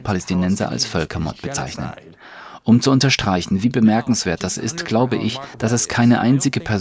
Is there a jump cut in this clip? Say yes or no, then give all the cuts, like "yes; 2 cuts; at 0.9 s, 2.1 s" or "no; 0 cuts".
no; 0 cuts